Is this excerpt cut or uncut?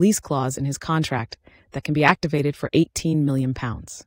uncut